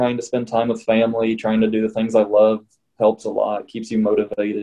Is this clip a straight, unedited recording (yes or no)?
yes